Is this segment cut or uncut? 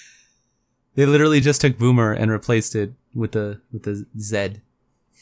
uncut